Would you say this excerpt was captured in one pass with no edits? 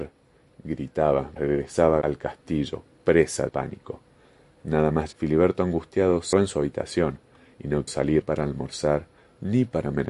no; 7 cuts; at 1.4 s, 2.0 s, 3.5 s, 5.1 s, 6.3 s, 7.9 s, 8.2 s

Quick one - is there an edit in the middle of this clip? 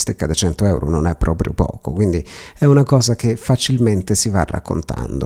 no; 0 cuts

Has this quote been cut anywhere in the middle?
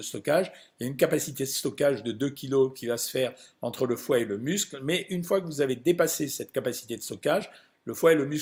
no; 0 cuts

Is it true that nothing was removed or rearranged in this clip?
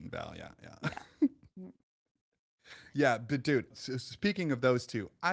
no; 2 cuts; at 1.8 s, 3.7 s

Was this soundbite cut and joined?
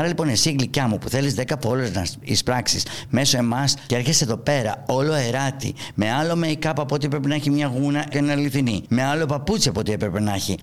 yes; 1 cut; at 8.1 s

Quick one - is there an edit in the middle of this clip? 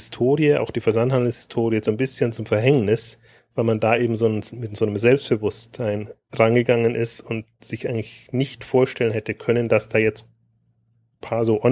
no; 0 cuts

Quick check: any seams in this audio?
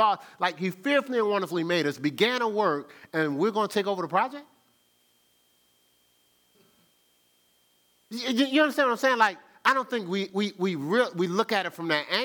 no; 0 cuts

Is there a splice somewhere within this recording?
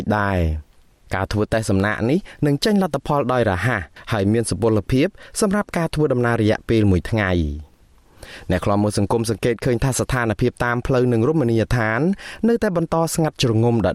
no; 0 cuts

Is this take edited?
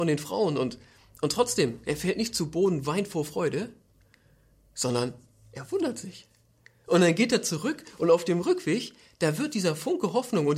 no; 0 cuts

